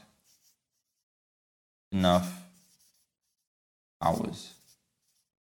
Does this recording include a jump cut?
no; 0 cuts

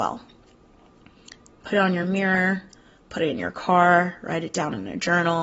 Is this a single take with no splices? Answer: yes; 0 cuts

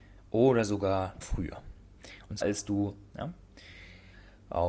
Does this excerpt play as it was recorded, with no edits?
no; 3 cuts; at 1.2 s, 2.4 s, 3.1 s

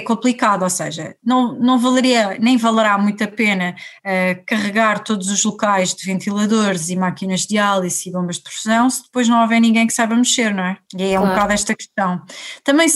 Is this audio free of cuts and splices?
no; 1 cut; at 10.9 s

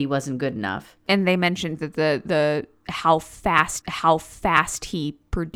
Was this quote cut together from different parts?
yes; 2 cuts; at 1.8 s, 3.8 s

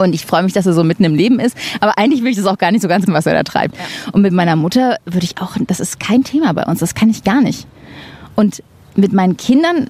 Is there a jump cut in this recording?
yes; 1 cut; at 3.1 s

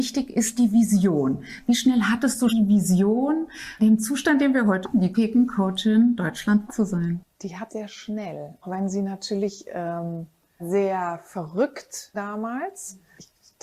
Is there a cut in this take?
yes; 9 cuts; at 2.5 s, 3.8 s, 4.8 s, 5.1 s, 6.7 s, 7.7 s, 8.6 s, 10.6 s, 12.1 s

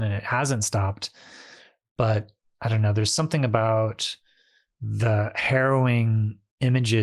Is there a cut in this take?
no; 0 cuts

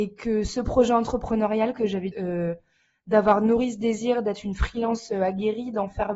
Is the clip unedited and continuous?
no; 1 cut; at 2.1 s

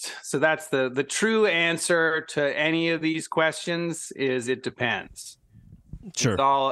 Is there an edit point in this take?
no; 0 cuts

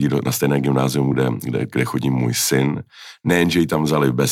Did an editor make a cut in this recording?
no; 0 cuts

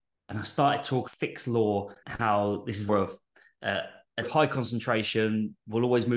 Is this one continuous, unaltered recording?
no; 4 cuts; at 1.1 s, 2.0 s, 2.9 s, 4.2 s

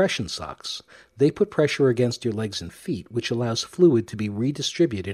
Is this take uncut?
yes; 0 cuts

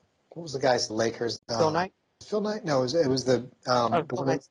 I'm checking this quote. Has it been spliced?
yes; 3 cuts; at 0.9 s, 1.4 s, 2.2 s

